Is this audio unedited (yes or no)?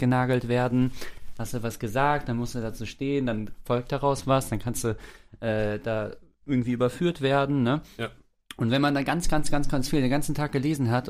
yes